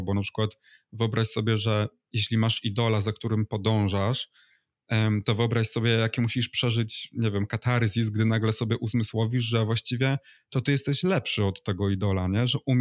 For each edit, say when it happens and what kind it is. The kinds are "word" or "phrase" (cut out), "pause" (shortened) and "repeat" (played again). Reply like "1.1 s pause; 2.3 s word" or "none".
none